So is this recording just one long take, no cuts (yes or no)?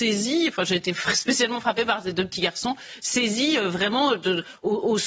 yes